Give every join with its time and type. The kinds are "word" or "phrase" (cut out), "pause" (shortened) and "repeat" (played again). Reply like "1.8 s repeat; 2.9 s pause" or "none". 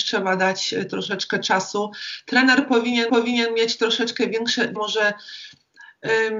3.1 s repeat; 4.8 s word